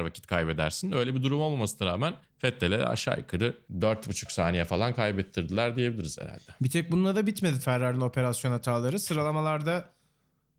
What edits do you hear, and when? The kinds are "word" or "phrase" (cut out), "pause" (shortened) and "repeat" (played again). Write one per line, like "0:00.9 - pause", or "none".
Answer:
0:07.6 - word